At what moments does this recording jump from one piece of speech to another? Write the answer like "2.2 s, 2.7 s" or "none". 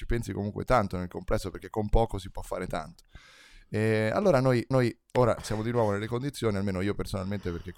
4.7 s